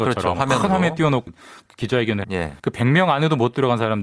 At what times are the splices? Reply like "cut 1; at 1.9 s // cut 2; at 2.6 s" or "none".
cut 1; at 1.3 s // cut 2; at 2.2 s // cut 3; at 2.6 s